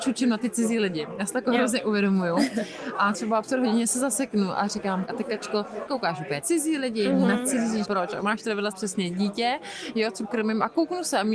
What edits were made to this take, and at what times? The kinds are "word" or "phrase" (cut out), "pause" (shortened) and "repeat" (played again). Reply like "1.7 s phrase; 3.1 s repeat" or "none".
3.4 s word; 5.1 s word; 5.9 s word; 6.4 s word; 7.8 s word; 8.7 s word; 10.2 s word